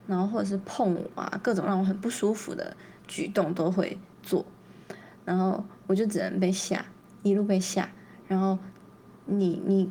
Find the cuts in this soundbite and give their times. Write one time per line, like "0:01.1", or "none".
0:03.0